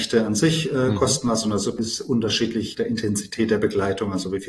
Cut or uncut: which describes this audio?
cut